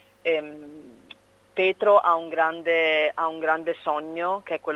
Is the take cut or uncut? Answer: uncut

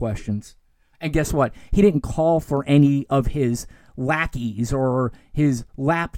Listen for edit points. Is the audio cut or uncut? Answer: uncut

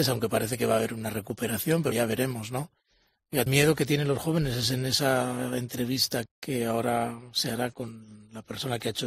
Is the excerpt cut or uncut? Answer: cut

